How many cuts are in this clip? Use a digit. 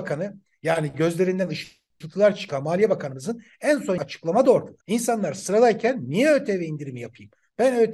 2